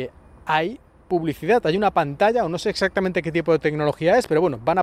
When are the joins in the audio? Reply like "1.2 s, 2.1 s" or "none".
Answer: none

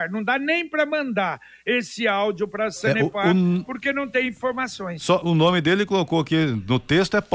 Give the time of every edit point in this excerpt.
none

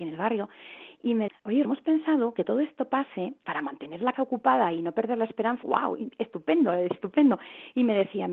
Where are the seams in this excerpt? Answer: 1.3 s, 1.6 s, 2.4 s, 3.4 s, 4.1 s, 5.6 s, 6.9 s

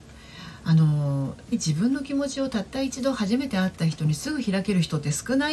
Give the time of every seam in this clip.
1.5 s

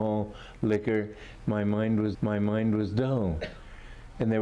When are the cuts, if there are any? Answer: 2.1 s

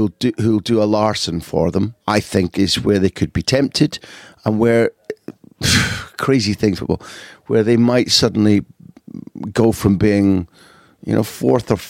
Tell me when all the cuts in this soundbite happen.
2.0 s, 2.5 s, 6.7 s

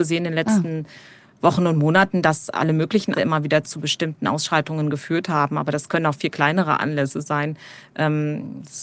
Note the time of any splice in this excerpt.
3.1 s

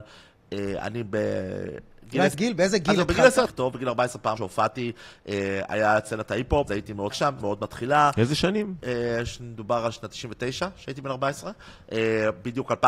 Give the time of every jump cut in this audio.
2.3 s, 3.5 s, 4.4 s, 6.7 s, 7.1 s, 7.4 s

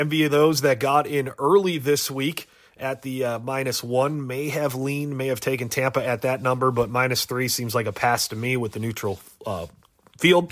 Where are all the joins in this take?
none

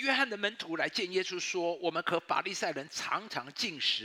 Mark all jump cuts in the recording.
none

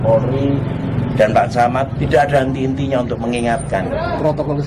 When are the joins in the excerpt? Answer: 2.0 s

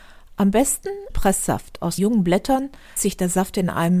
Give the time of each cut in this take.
1.1 s, 2.0 s, 3.0 s

